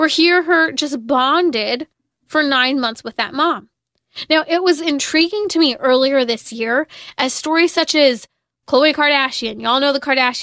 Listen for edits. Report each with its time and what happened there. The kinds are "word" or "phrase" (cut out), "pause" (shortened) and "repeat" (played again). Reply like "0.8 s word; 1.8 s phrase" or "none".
none